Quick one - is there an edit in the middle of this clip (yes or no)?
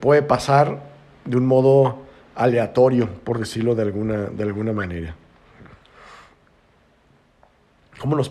no